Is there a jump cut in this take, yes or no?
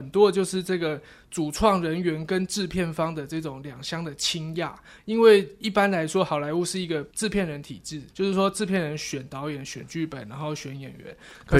yes